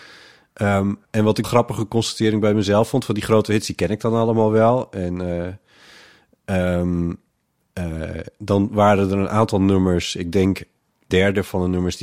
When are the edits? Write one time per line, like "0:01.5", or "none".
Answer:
0:01.0
0:01.4
0:11.1